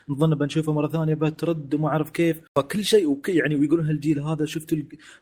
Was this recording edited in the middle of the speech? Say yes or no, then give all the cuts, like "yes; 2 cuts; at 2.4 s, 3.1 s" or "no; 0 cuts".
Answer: yes; 1 cut; at 2.5 s